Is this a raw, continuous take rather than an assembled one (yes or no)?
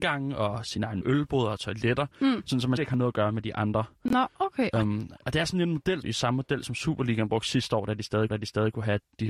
no